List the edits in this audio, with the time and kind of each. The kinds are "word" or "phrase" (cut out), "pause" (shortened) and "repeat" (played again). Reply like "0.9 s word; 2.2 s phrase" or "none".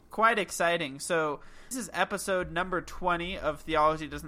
1.7 s word